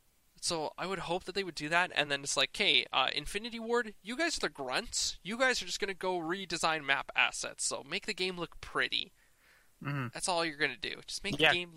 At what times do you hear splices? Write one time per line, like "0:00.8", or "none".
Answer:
none